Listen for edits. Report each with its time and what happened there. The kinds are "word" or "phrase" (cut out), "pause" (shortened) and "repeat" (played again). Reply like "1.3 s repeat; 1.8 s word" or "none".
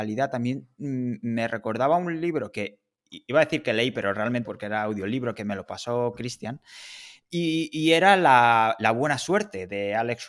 4.4 s phrase